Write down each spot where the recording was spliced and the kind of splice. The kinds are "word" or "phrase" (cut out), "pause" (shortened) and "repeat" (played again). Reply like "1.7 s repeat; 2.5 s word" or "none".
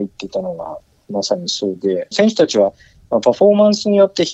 2.1 s phrase